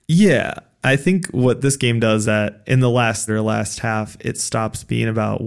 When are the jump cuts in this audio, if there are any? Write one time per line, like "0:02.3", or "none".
0:02.2
0:03.3